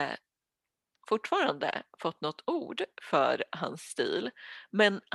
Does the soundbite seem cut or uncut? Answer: uncut